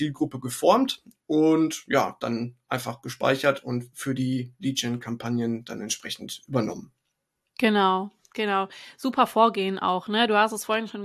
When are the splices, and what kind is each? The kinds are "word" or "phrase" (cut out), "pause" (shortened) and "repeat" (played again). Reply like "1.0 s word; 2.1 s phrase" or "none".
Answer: none

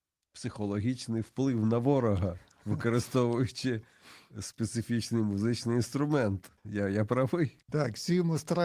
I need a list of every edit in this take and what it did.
6.6 s pause; 7.6 s pause

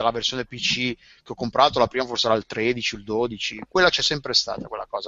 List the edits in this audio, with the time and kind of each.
none

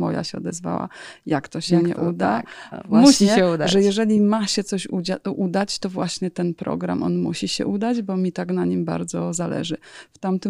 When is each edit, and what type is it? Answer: none

